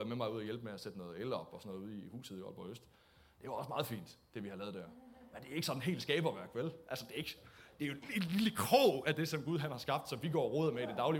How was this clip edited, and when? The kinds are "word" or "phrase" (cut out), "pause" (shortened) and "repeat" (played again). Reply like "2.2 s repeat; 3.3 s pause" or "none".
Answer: none